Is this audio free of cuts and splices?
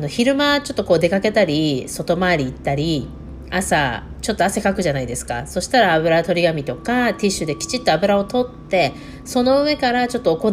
yes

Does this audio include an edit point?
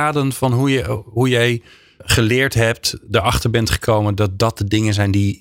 no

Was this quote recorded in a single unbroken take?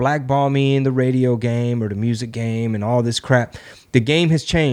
yes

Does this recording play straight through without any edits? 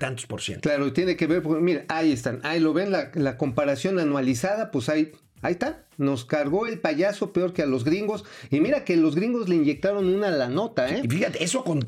yes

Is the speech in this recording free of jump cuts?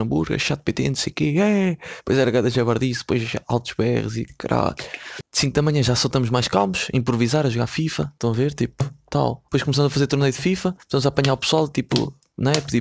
no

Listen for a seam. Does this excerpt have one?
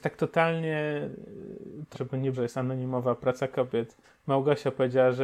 yes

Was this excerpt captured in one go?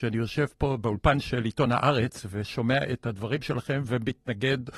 yes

